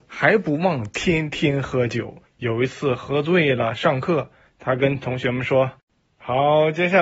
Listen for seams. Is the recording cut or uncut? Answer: cut